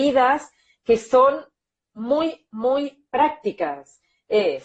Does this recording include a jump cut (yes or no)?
no